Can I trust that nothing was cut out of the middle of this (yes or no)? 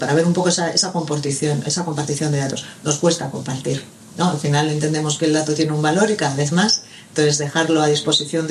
yes